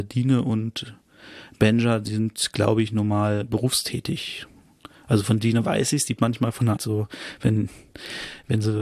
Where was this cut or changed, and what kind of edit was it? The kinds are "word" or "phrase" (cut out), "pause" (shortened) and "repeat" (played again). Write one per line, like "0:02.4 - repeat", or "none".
0:06.2 - word
0:06.8 - word

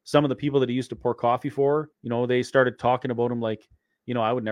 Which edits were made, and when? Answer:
0:01.9 - pause

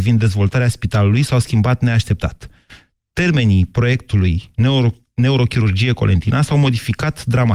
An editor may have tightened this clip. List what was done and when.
none

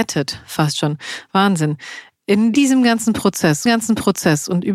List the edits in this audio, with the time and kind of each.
0:02.5 - word
0:03.7 - repeat

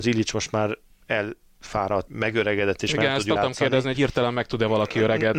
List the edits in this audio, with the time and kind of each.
0:02.1 - word
0:03.4 - word
0:03.9 - word

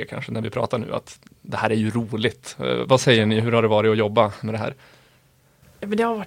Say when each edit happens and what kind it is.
none

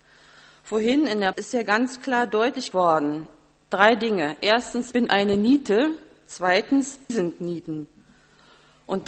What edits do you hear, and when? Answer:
0:01.3 - word
0:02.7 - word
0:04.9 - word
0:07.1 - word

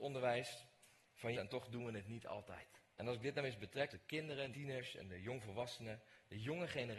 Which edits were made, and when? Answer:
0:01.3 - word
0:02.9 - pause
0:03.9 - word
0:04.5 - word

